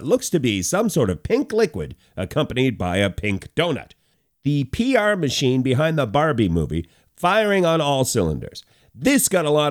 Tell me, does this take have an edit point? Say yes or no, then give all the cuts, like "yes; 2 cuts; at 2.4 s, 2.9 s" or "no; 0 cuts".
no; 0 cuts